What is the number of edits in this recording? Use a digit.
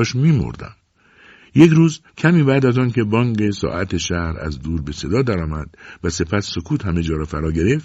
1